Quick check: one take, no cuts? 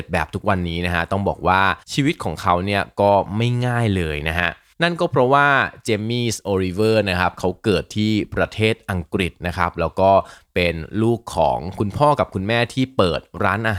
no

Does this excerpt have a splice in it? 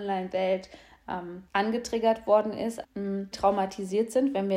yes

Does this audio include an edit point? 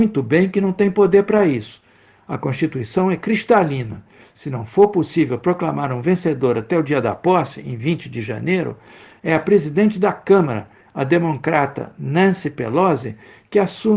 no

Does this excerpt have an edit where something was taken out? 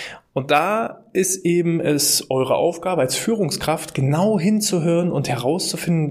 no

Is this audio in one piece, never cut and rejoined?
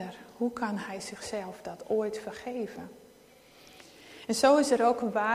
yes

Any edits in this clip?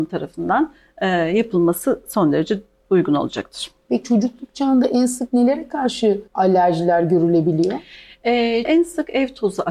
yes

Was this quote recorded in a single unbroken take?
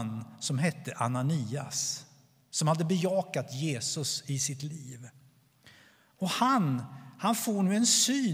yes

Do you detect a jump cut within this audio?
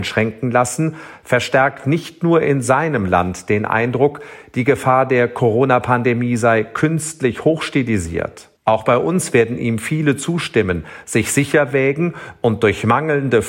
yes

